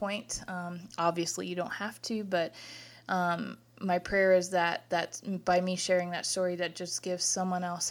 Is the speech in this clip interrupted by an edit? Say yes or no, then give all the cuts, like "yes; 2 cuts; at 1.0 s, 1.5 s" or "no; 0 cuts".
no; 0 cuts